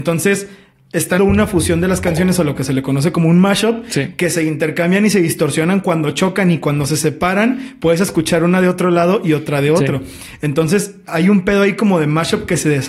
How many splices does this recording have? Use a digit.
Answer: 1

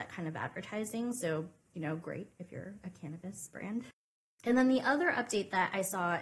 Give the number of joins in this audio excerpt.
0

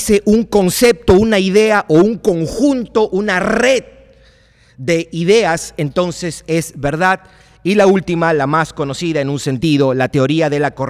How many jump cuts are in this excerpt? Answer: 0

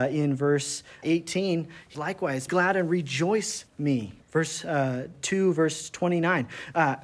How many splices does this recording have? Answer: 6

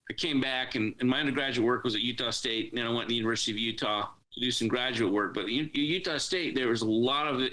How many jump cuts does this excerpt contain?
1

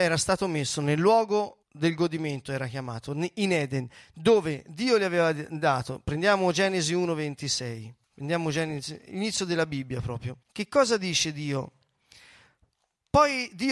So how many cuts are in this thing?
3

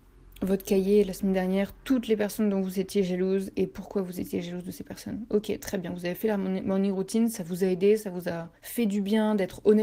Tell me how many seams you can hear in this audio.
1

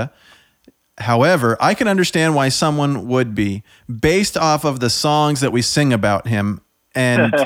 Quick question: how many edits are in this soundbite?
0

